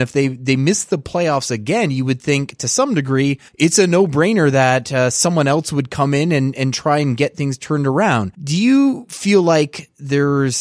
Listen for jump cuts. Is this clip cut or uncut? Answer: cut